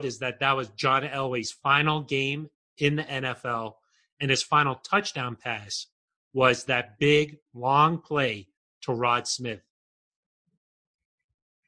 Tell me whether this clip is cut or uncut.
uncut